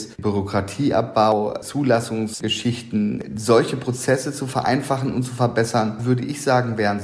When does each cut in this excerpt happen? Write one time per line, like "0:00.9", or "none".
0:06.0